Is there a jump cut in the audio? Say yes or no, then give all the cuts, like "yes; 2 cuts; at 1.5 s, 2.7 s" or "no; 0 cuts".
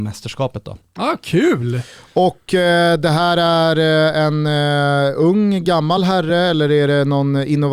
no; 0 cuts